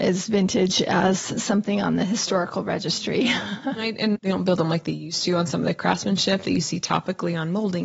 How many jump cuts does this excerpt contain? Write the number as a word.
one